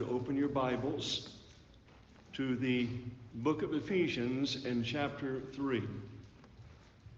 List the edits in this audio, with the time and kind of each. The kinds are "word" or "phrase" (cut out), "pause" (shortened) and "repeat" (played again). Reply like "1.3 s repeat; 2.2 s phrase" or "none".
2.3 s pause